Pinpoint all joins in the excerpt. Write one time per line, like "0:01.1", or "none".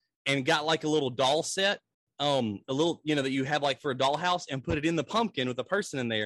none